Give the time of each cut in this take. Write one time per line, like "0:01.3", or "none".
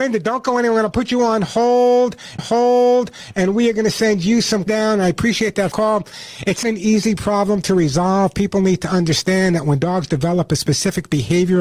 0:02.4
0:04.7
0:05.7
0:06.6